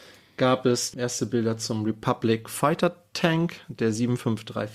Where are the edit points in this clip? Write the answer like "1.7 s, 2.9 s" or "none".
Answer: 0.9 s